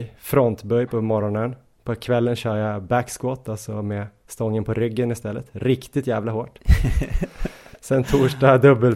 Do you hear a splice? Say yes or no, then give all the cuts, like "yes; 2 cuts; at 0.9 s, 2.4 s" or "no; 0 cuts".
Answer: no; 0 cuts